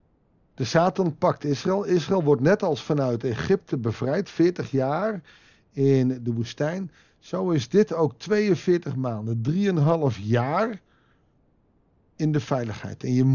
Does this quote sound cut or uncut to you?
uncut